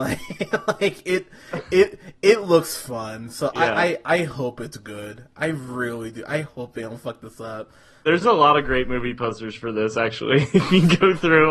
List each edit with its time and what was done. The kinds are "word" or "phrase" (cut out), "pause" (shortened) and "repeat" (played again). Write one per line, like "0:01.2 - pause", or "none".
none